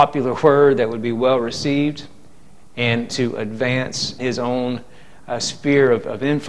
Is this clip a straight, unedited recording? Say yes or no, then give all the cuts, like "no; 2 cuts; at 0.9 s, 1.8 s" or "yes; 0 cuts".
no; 2 cuts; at 3.1 s, 4.2 s